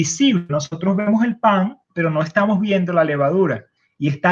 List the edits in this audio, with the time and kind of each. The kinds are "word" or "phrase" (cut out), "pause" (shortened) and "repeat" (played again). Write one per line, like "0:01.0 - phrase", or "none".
0:01.8 - pause